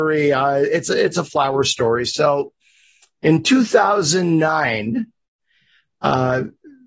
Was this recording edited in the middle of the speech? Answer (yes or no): no